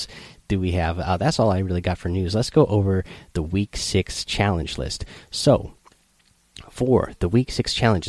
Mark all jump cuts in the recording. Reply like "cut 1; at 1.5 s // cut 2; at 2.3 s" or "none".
none